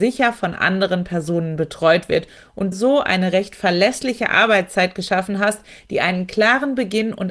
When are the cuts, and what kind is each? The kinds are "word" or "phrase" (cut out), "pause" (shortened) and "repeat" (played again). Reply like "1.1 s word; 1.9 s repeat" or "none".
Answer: 2.7 s phrase

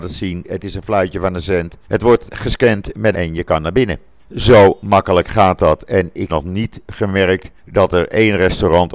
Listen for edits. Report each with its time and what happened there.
1.8 s pause; 2.3 s word; 3.1 s phrase; 4.2 s pause; 6.3 s word; 7.6 s pause

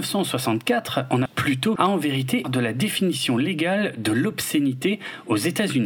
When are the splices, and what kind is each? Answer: 1.3 s word; 1.8 s word; 2.4 s phrase

